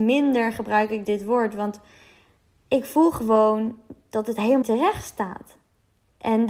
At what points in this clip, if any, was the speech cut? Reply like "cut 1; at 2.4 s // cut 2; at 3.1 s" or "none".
cut 1; at 1.0 s // cut 2; at 4.6 s